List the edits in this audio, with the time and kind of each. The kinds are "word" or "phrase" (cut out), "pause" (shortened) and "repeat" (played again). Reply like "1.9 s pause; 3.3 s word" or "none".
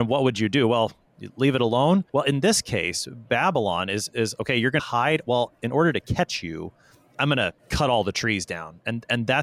2.1 s pause; 4.8 s phrase; 7.6 s pause